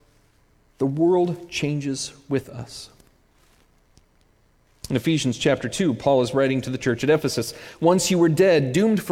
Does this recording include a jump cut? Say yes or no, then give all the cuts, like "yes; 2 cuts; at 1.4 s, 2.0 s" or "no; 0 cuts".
no; 0 cuts